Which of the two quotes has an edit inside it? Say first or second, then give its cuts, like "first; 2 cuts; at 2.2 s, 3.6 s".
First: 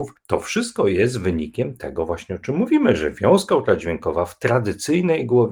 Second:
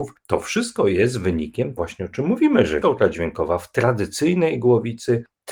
second; 2 cuts; at 1.8 s, 2.8 s